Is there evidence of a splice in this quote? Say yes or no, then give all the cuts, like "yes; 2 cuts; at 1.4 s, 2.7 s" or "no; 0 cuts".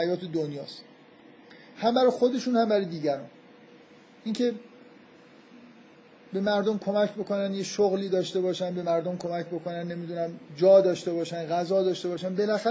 yes; 2 cuts; at 3.8 s, 10.5 s